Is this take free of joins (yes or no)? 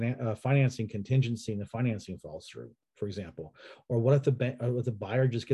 yes